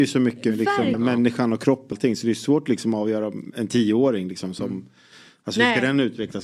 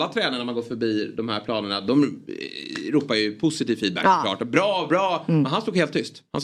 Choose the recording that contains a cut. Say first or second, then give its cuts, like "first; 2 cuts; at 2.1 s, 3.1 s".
first; 2 cuts; at 0.9 s, 1.9 s